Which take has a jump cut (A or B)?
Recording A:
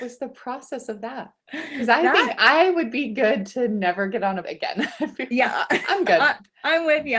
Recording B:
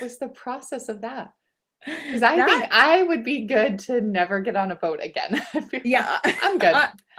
A